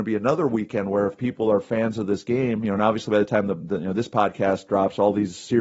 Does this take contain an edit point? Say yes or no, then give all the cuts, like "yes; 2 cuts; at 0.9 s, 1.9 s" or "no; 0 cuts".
no; 0 cuts